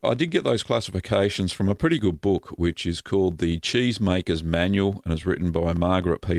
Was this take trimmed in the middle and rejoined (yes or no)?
no